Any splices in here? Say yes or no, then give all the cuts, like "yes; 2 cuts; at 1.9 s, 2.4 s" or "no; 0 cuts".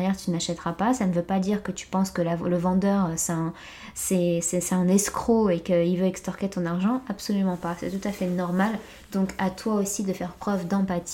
no; 0 cuts